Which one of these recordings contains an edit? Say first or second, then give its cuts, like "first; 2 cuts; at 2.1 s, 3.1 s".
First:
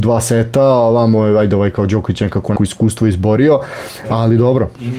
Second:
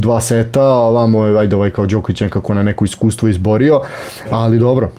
first; 1 cut; at 2.6 s